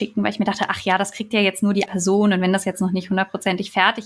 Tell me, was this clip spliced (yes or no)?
yes